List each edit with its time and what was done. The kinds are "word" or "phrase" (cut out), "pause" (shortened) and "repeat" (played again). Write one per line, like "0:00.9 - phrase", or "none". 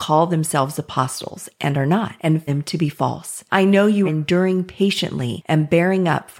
0:02.5 - word
0:04.0 - word